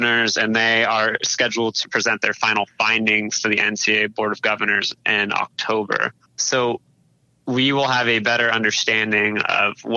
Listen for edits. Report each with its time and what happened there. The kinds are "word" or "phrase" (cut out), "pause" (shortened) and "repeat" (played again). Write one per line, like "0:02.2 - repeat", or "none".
0:06.2 - pause